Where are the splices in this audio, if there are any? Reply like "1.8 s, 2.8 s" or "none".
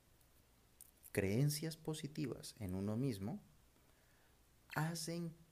none